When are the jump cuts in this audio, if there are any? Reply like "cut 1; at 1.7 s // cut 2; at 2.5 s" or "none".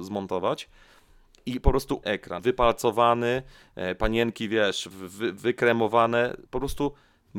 cut 1; at 2.0 s // cut 2; at 2.4 s // cut 3; at 4.9 s // cut 4; at 6.5 s